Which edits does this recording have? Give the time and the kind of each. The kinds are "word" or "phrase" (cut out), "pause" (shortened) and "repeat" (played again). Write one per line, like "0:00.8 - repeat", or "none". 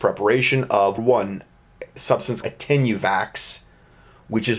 0:01.0 - word
0:02.4 - word